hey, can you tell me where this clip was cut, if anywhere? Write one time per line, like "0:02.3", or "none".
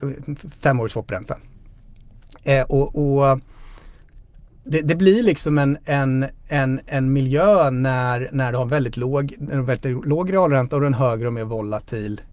none